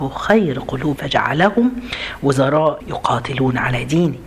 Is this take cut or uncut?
cut